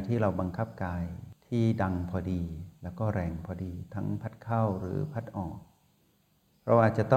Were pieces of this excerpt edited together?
no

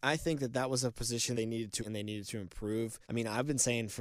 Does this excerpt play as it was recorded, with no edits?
no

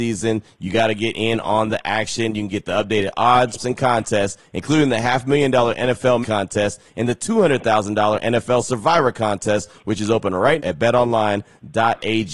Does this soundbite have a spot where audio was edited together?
yes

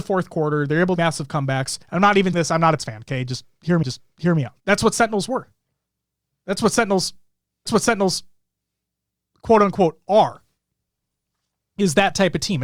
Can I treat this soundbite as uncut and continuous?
no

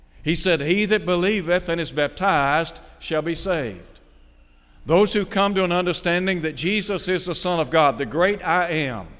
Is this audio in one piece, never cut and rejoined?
yes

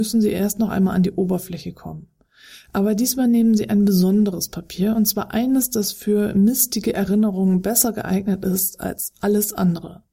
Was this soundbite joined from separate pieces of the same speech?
no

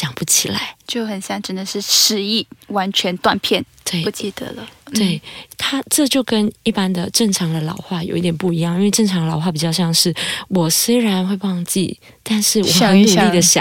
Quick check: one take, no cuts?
yes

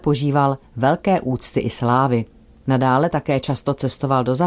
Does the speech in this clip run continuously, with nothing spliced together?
yes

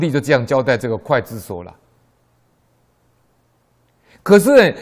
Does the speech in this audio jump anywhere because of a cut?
no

